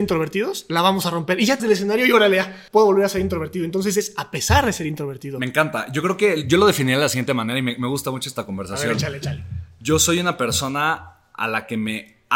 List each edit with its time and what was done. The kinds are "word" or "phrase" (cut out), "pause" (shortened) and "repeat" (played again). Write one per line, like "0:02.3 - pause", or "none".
0:01.6 - phrase
0:02.7 - pause